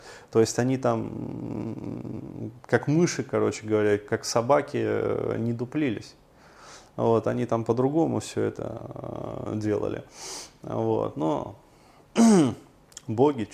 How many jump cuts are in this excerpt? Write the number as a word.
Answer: zero